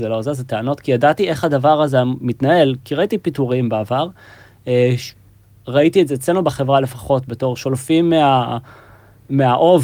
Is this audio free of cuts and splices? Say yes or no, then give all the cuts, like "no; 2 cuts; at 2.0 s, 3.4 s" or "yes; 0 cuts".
yes; 0 cuts